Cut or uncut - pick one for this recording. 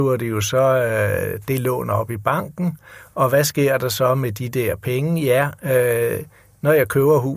uncut